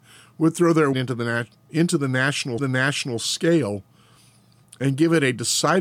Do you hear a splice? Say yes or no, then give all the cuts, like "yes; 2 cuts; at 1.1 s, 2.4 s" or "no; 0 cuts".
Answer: yes; 2 cuts; at 0.9 s, 2.6 s